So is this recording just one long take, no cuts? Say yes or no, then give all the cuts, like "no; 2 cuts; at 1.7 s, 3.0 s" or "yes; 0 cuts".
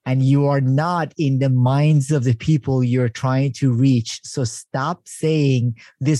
yes; 0 cuts